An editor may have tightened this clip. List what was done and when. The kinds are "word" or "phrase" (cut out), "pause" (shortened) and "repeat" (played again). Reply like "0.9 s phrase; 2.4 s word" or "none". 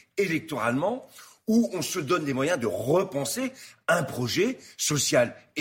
none